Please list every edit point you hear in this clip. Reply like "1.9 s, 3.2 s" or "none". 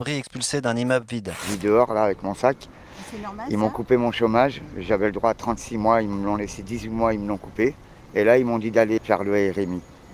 9.0 s